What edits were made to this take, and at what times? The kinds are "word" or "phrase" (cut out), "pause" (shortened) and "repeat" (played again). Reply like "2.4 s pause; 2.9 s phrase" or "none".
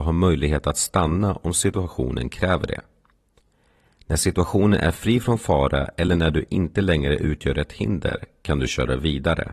none